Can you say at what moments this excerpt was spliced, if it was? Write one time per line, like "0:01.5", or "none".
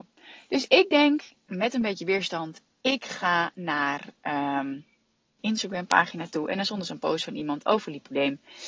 0:05.4